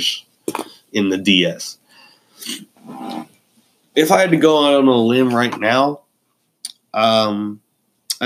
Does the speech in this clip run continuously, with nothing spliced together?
yes; 0 cuts

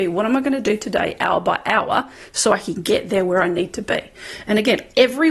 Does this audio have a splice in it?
no; 0 cuts

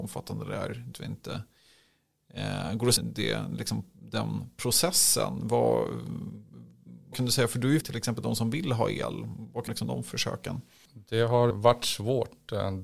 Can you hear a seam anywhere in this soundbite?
yes; 6 cuts; at 0.9 s, 3.0 s, 7.1 s, 7.8 s, 9.7 s, 11.5 s

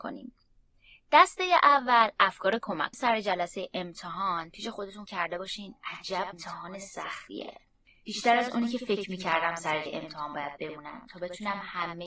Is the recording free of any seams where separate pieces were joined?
no; 4 cuts; at 2.9 s, 5.1 s, 6.3 s, 9.9 s

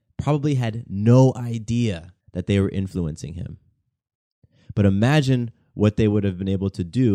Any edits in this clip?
yes; 1 cut; at 2.2 s

